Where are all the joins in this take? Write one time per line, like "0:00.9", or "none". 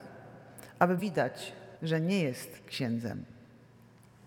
0:01.0
0:01.8
0:02.6

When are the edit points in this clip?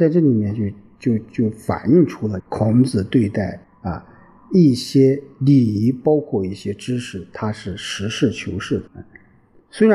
0:02.4
0:03.6
0:08.9

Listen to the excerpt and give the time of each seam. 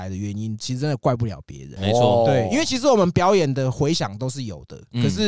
0:01.8

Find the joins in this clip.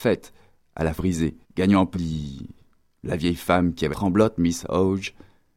0:01.0
0:01.4
0:01.9
0:03.9

